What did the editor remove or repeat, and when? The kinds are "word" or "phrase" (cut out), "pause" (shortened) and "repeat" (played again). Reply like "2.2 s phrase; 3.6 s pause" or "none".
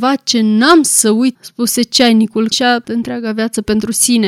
1.3 s phrase; 2.5 s word; 2.8 s word